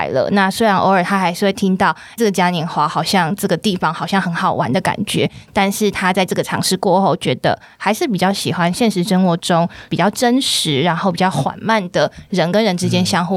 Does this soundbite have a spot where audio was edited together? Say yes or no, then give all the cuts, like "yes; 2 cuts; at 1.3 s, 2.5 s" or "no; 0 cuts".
yes; 1 cut; at 2.2 s